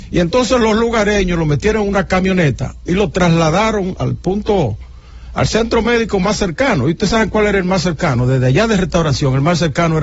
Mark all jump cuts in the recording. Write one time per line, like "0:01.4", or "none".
0:04.0